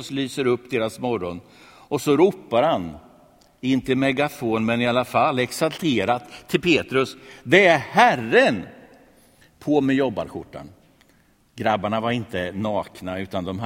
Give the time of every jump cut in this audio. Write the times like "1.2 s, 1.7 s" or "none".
none